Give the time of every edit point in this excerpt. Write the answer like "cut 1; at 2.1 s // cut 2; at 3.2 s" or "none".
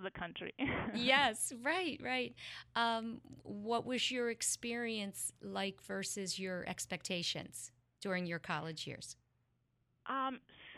none